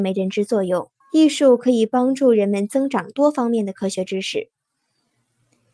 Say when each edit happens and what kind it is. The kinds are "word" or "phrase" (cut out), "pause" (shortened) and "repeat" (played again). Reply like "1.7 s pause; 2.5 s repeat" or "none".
1.0 s pause